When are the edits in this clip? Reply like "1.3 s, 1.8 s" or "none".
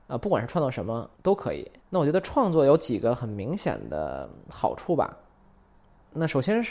1.1 s, 1.8 s